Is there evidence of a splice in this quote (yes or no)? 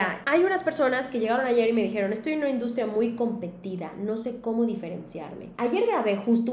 no